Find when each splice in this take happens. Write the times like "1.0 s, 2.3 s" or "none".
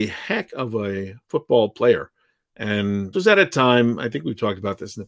3.1 s